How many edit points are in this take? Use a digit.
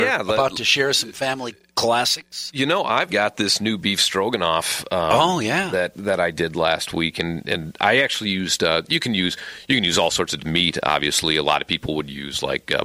2